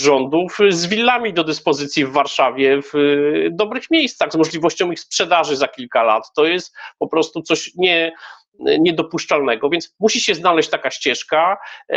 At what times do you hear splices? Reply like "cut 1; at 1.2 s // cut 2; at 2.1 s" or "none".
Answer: none